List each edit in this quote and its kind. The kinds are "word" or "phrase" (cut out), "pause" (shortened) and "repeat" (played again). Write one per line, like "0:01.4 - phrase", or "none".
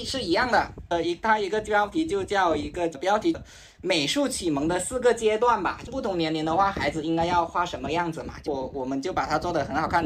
none